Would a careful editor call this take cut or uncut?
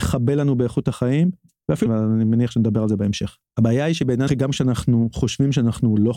cut